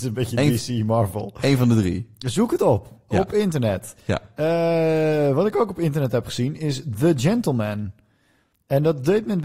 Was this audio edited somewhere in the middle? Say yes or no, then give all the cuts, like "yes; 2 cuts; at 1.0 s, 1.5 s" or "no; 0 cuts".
no; 0 cuts